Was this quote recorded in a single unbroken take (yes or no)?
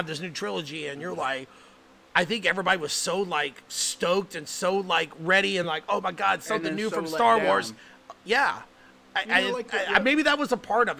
yes